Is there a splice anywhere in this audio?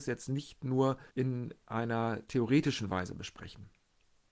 yes; 1 cut; at 1.1 s

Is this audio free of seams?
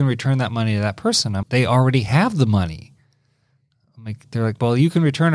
no; 1 cut; at 1.4 s

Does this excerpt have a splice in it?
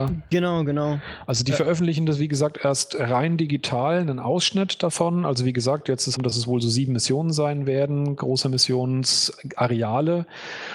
yes; 1 cut; at 6.2 s

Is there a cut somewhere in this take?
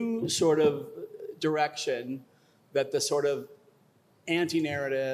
no; 0 cuts

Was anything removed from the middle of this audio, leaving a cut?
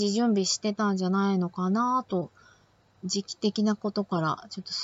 no; 0 cuts

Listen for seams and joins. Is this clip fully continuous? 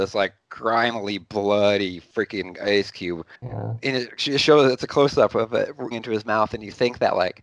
no; 2 cuts; at 3.4 s, 5.9 s

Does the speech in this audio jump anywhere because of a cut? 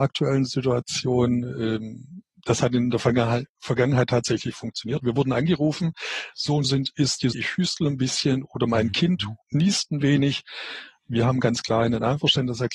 yes; 3 cuts; at 6.6 s, 7.3 s, 9.4 s

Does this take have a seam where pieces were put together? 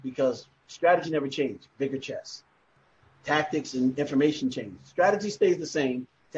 no; 0 cuts

